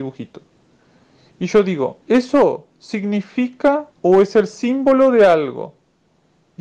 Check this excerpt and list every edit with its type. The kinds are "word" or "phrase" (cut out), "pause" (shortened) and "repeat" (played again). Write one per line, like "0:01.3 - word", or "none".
0:02.0 - pause
0:03.9 - pause